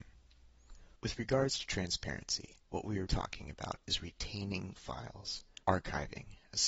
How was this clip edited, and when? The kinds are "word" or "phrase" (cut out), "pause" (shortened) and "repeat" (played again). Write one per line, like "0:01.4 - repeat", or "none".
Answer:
0:01.0 - pause
0:02.6 - pause
0:03.1 - word
0:04.8 - word
0:05.6 - pause